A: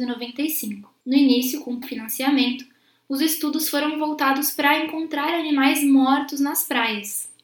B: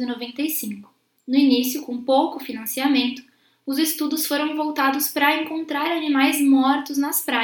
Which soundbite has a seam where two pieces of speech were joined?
A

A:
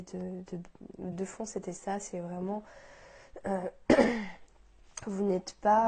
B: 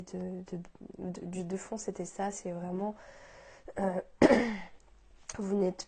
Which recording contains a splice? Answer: A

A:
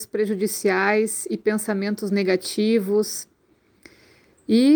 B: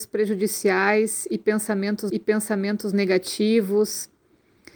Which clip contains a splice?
B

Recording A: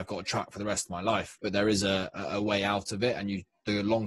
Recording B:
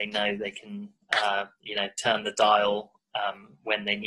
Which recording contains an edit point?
A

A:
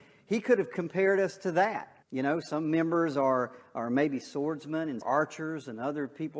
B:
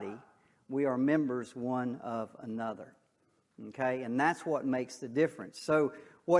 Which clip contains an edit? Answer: A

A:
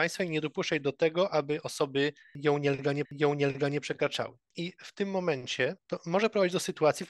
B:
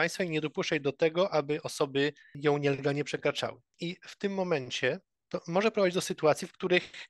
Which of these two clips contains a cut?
A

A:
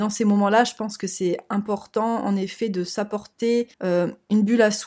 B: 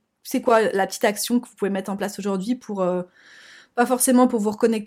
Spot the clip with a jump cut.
A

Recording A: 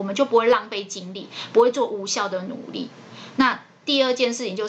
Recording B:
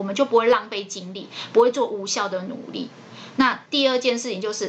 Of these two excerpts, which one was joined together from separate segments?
B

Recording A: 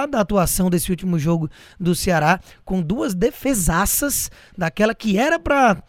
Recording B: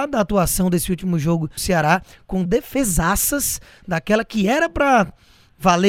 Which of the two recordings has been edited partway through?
B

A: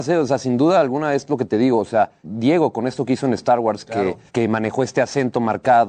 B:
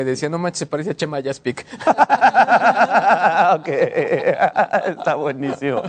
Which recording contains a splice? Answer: A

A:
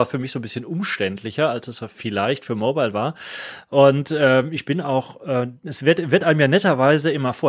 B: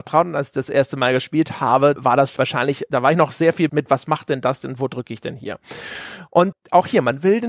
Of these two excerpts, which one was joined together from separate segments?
B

